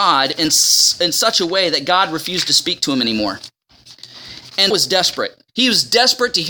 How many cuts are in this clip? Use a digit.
2